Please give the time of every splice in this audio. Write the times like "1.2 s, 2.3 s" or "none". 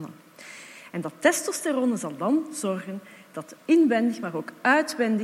none